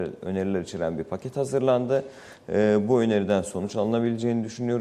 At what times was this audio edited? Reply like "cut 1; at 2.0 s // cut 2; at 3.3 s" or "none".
none